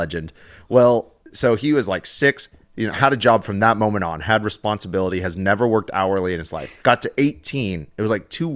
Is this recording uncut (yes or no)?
no